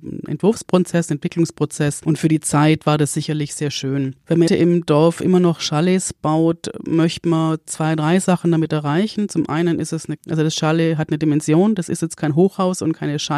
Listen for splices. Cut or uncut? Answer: cut